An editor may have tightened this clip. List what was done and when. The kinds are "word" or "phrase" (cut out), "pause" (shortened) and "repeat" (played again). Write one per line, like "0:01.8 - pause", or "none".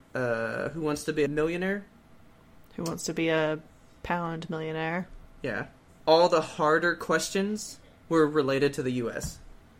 none